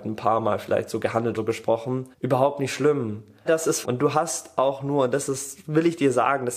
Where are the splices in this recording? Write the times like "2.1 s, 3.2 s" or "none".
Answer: 1.3 s, 2.1 s, 3.5 s, 3.8 s